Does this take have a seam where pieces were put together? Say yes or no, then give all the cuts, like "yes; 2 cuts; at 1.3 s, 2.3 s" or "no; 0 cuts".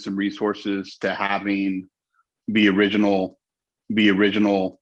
yes; 1 cut; at 3.7 s